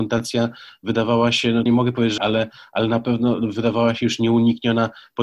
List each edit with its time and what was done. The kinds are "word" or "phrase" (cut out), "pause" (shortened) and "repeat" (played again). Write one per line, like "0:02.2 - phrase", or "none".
0:01.7 - phrase
0:02.2 - phrase